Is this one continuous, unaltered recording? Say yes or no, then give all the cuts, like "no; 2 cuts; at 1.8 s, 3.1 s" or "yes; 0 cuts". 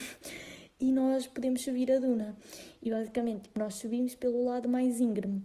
yes; 0 cuts